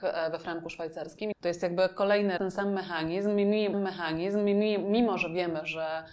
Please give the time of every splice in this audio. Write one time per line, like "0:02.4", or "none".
0:01.3
0:02.4
0:03.7